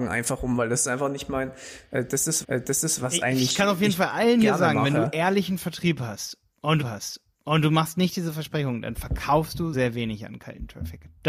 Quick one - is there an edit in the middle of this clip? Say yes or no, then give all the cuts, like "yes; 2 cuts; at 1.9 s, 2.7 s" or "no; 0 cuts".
yes; 3 cuts; at 2.4 s, 6.8 s, 9.7 s